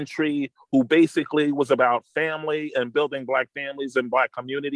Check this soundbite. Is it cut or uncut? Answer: uncut